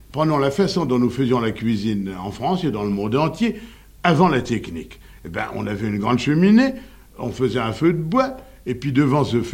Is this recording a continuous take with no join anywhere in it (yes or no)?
yes